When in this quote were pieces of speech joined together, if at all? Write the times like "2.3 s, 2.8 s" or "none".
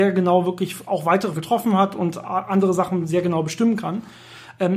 1.4 s